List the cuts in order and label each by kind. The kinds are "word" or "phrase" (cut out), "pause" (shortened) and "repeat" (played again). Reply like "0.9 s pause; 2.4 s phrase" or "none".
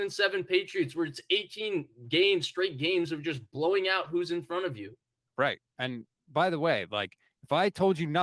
none